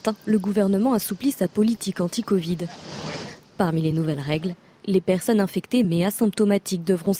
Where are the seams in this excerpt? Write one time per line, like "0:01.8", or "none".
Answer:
none